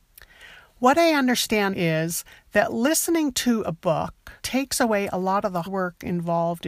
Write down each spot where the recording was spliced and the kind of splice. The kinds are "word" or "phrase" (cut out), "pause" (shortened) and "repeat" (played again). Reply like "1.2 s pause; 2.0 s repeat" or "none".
1.7 s word; 4.4 s pause; 5.6 s word